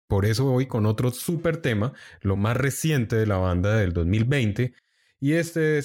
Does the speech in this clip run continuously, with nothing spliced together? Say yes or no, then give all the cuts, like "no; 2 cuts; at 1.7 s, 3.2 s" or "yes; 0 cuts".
yes; 0 cuts